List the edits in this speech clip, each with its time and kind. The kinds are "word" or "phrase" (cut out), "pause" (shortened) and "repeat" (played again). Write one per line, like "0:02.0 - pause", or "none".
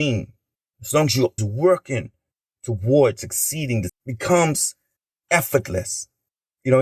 0:01.4 - word
0:03.9 - word